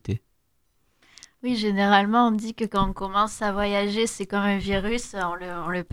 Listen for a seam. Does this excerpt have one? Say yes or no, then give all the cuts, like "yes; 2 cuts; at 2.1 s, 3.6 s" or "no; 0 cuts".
no; 0 cuts